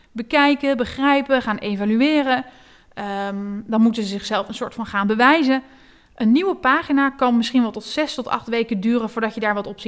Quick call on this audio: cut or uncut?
uncut